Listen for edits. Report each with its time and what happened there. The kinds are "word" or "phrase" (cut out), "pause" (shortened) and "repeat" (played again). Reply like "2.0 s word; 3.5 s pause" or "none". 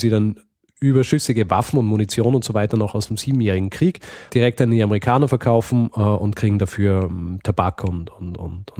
4.3 s word